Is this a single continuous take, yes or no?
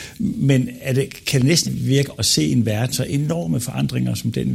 no